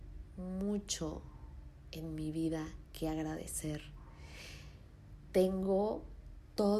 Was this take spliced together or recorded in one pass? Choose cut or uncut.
uncut